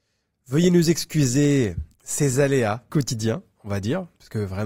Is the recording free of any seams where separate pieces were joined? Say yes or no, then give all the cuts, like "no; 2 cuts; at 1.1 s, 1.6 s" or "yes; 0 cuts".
no; 1 cut; at 2.9 s